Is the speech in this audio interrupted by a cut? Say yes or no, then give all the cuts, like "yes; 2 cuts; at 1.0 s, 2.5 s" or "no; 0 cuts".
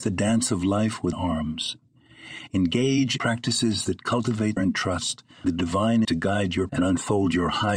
yes; 6 cuts; at 1.1 s, 3.2 s, 4.6 s, 5.4 s, 6.0 s, 6.7 s